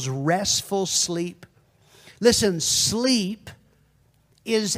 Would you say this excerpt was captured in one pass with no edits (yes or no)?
yes